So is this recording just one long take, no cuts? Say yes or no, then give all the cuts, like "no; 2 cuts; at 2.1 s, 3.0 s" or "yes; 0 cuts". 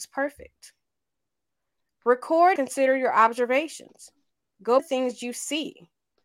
no; 2 cuts; at 2.6 s, 4.8 s